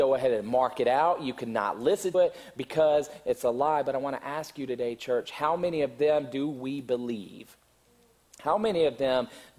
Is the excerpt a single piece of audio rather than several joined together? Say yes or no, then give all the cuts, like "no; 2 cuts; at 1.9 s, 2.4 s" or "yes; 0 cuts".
no; 1 cut; at 2.1 s